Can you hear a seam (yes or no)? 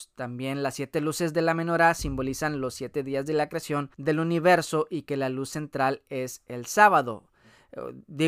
yes